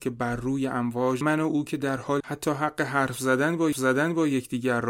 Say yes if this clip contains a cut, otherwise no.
yes